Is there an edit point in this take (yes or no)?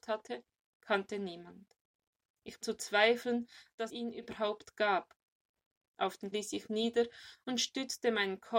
yes